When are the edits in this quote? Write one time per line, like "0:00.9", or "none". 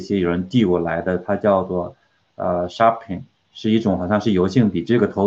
none